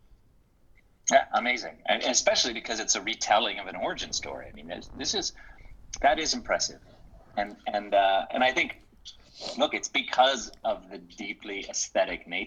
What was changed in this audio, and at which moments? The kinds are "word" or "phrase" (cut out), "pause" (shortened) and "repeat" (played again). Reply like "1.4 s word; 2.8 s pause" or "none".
none